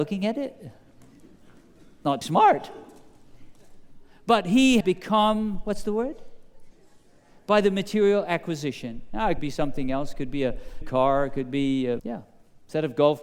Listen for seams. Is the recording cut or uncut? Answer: cut